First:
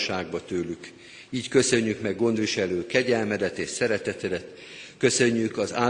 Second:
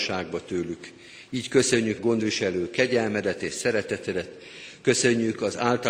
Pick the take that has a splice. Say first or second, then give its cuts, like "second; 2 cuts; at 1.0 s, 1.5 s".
second; 1 cut; at 2.0 s